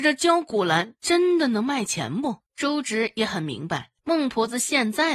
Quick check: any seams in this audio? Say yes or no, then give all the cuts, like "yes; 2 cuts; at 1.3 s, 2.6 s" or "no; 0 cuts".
yes; 2 cuts; at 2.5 s, 4.0 s